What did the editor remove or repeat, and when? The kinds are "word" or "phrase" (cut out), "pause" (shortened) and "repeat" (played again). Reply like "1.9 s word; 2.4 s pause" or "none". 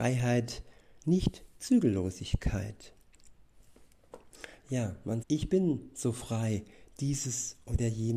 5.2 s word